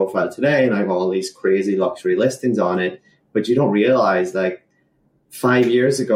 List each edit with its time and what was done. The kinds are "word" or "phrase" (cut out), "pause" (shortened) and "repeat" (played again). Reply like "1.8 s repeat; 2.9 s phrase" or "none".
none